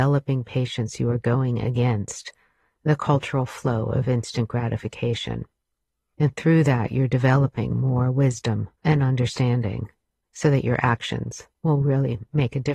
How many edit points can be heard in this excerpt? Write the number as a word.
zero